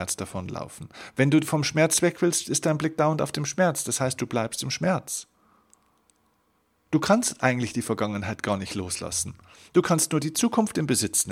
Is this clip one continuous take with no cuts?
yes; 0 cuts

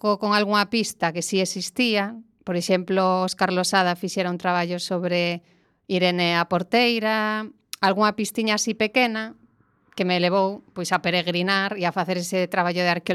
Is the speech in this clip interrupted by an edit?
no; 0 cuts

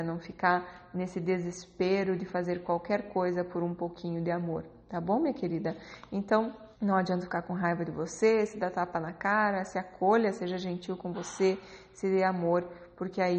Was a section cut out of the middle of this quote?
yes; 1 cut; at 6.7 s

